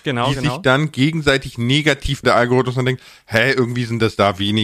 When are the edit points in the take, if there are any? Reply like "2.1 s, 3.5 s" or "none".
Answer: 2.2 s